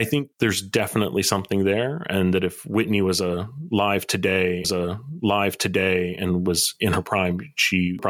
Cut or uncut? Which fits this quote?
cut